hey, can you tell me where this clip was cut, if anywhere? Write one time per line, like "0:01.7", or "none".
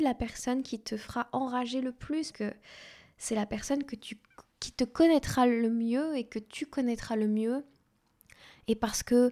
0:02.3

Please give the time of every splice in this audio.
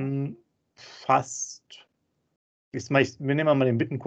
0:02.7

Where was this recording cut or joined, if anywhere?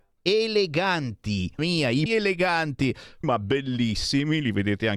0:01.6
0:02.1
0:03.2

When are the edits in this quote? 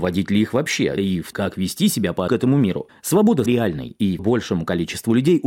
0:01.0
0:01.3
0:02.3
0:03.5
0:04.2

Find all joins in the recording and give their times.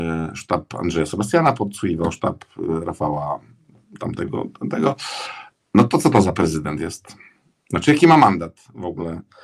none

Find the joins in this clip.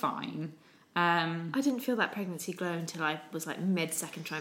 none

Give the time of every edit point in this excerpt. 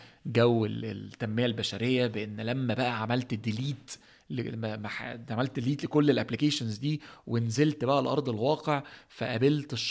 none

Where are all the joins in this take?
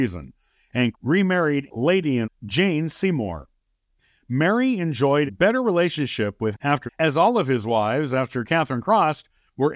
0:00.9
0:01.7
0:02.2
0:05.3
0:06.5
0:06.9

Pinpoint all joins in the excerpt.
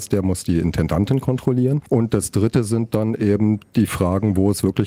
none

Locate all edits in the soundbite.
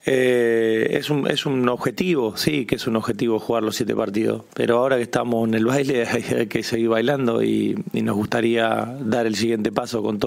0:04.5

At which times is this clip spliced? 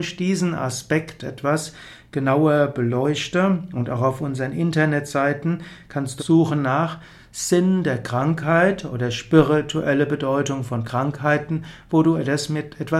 0:06.2

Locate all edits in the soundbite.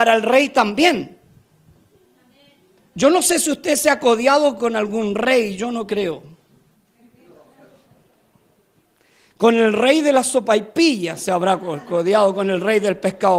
none

